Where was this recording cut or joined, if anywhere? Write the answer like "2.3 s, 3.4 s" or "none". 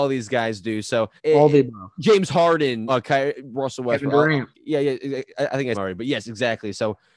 1.2 s, 2.9 s, 4.5 s, 5.7 s